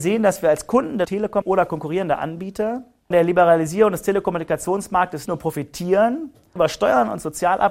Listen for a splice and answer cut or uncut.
cut